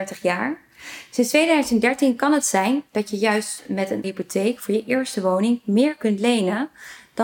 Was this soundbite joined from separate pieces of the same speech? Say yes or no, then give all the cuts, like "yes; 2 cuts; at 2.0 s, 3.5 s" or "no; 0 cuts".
yes; 1 cut; at 4.0 s